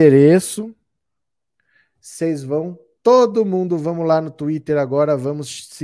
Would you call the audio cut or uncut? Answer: uncut